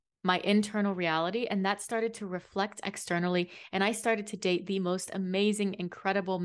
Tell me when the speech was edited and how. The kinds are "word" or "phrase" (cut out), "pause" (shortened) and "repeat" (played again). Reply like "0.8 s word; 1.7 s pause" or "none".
none